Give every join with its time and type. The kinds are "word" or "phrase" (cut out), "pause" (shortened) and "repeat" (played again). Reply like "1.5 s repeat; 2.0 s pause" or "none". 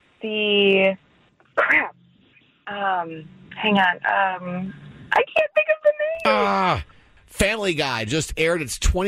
none